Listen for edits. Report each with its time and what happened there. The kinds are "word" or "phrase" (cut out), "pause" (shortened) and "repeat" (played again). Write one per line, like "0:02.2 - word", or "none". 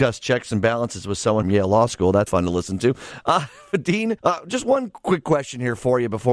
0:01.4 - phrase
0:02.3 - word
0:04.2 - pause